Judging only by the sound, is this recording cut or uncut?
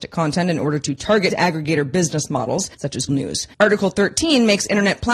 cut